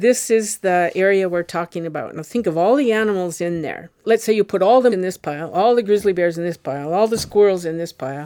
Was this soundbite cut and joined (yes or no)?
yes